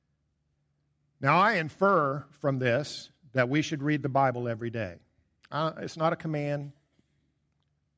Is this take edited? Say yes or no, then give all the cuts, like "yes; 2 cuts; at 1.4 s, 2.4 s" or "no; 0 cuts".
no; 0 cuts